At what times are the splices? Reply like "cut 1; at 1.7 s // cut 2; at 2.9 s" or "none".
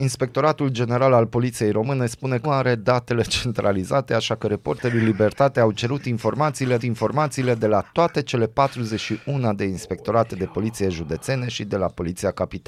cut 1; at 2.4 s // cut 2; at 6.8 s

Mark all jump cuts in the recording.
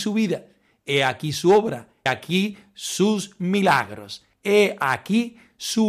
cut 1; at 2.1 s // cut 2; at 4.3 s

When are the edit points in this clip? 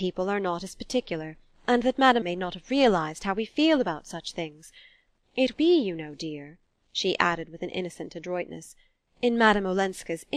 cut 1; at 2.2 s // cut 2; at 5.5 s

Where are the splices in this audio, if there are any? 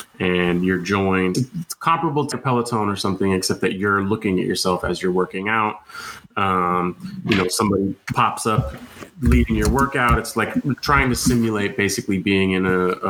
cut 1; at 1.3 s // cut 2; at 2.3 s

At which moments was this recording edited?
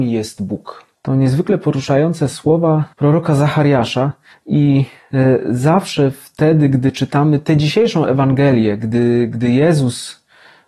cut 1; at 1.0 s // cut 2; at 2.9 s // cut 3; at 4.3 s

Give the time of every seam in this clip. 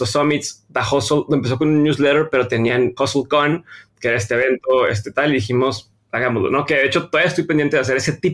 cut 1; at 3.0 s

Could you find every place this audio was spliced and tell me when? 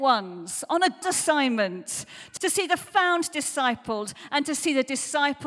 cut 1; at 1.0 s // cut 2; at 2.4 s

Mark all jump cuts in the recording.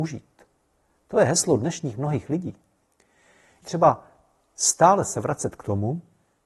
cut 1; at 3.6 s

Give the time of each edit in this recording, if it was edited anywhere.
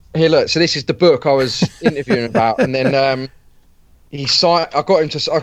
none

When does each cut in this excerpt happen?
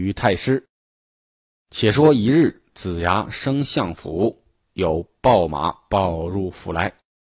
none

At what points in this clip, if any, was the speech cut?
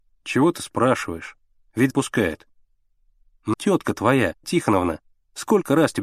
cut 1; at 1.9 s // cut 2; at 3.5 s // cut 3; at 4.4 s

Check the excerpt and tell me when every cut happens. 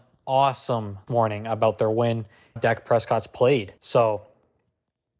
cut 1; at 1.1 s // cut 2; at 2.6 s // cut 3; at 3.8 s

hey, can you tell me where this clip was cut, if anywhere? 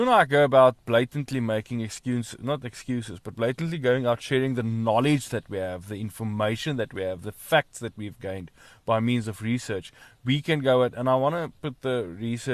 none

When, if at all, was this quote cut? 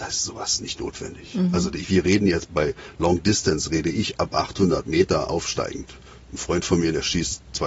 none

